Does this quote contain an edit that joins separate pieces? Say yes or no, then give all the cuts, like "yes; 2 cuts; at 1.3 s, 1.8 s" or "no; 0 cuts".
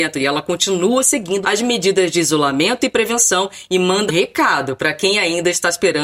yes; 2 cuts; at 1.4 s, 4.1 s